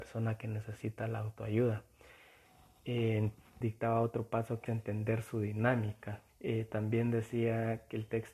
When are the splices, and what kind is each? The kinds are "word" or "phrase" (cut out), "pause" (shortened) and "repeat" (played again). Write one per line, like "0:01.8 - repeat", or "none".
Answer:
0:03.6 - word
0:04.7 - word
0:06.3 - pause